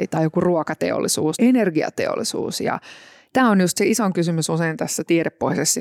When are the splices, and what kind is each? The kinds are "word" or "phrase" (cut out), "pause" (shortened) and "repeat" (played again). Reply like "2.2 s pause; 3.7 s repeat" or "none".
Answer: 1.4 s word